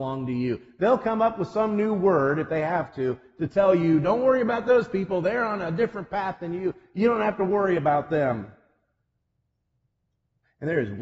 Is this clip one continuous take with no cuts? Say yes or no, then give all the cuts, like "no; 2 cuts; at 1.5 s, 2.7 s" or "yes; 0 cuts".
yes; 0 cuts